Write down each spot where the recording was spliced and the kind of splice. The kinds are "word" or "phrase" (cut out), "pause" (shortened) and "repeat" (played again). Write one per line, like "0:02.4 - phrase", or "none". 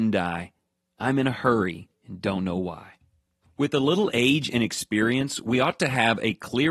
none